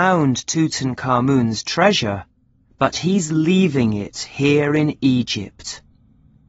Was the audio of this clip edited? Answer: no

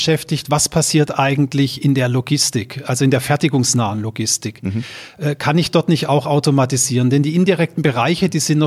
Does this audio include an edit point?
no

